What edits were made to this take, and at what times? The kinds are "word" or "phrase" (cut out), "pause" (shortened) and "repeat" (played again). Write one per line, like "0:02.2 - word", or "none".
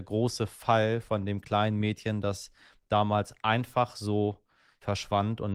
none